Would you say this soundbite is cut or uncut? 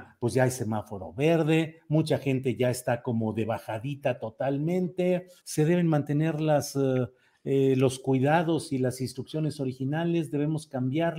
cut